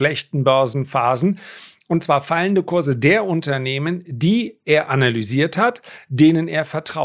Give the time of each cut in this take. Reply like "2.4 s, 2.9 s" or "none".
none